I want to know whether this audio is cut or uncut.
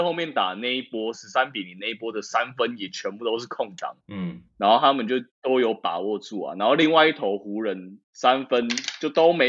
cut